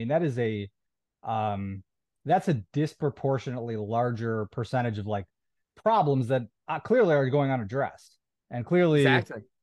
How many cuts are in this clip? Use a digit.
0